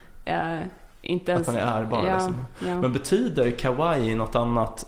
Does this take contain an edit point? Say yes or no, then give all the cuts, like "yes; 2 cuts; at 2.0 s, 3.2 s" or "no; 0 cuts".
no; 0 cuts